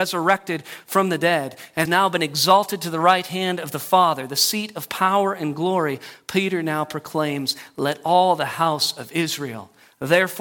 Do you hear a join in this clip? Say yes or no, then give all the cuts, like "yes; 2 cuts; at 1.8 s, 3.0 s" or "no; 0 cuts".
yes; 1 cut; at 1.9 s